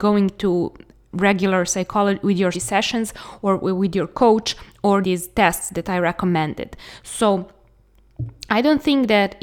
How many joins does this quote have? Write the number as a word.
two